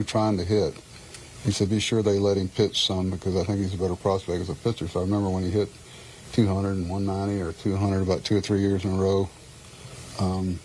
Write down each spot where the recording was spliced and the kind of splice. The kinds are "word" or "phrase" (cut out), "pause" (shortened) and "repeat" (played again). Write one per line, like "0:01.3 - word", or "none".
none